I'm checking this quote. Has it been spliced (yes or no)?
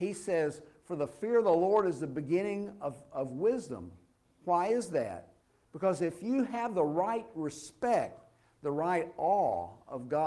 no